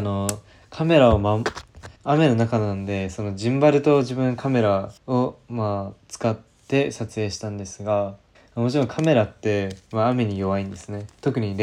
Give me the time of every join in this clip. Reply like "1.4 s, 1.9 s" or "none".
2.0 s, 5.0 s, 8.3 s